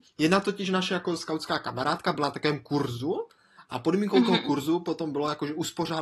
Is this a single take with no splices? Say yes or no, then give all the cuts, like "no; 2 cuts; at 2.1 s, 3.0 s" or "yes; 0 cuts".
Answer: yes; 0 cuts